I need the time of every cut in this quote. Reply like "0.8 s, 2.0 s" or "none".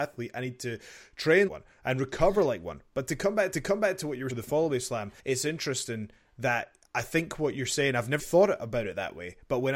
1.5 s, 3.5 s, 4.3 s, 5.2 s, 8.2 s